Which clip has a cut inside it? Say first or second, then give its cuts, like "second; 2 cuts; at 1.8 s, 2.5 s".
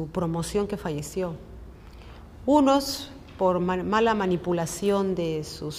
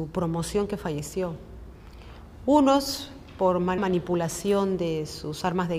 second; 1 cut; at 3.8 s